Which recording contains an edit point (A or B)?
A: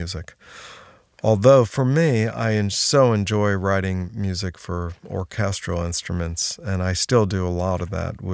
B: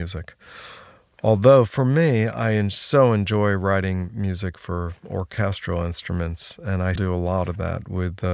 B